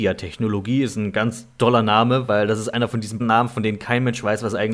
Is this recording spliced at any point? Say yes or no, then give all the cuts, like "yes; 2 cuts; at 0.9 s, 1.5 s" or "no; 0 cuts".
yes; 1 cut; at 3.2 s